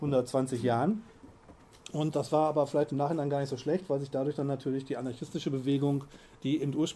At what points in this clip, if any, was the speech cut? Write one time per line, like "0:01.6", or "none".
none